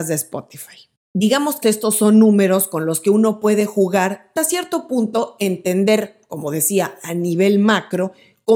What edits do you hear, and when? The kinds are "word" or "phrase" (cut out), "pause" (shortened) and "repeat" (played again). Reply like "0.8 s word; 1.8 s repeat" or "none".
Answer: 1.6 s word; 4.4 s word